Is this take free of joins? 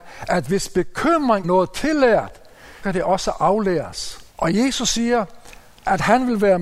no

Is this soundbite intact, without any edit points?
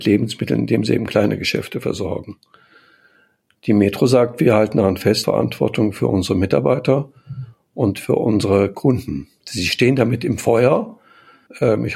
no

